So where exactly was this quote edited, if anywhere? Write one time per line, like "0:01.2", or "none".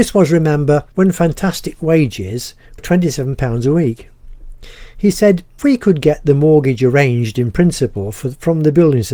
0:00.9
0:02.8
0:05.6